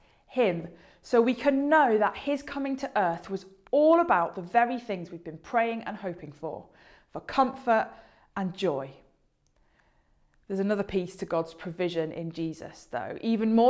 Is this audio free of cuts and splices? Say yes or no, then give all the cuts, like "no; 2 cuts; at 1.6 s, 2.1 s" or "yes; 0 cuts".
yes; 0 cuts